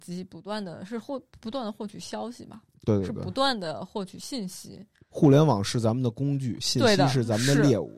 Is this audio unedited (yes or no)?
no